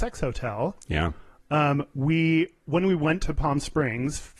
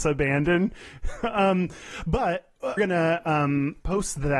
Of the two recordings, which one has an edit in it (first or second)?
second